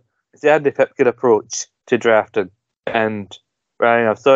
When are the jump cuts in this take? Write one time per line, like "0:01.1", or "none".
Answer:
0:01.8
0:02.7